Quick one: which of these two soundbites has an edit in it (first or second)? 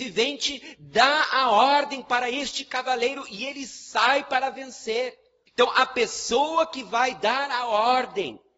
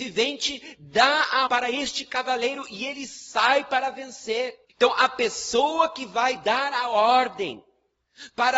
second